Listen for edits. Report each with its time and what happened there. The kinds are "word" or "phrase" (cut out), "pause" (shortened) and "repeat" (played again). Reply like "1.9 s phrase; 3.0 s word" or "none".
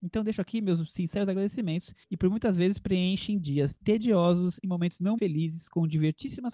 2.0 s pause; 4.6 s word; 5.2 s word